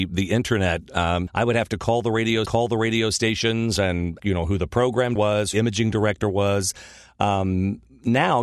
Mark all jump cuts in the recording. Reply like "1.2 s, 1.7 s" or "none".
1.3 s, 2.5 s, 4.2 s, 5.2 s, 5.5 s